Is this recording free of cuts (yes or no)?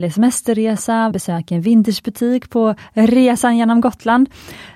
no